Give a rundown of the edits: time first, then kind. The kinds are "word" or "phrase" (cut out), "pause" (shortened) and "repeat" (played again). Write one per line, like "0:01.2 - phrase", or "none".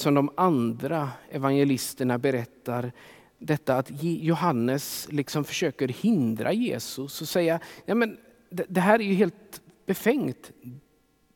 none